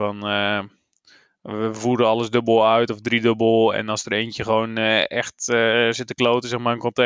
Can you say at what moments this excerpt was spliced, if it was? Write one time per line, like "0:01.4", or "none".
none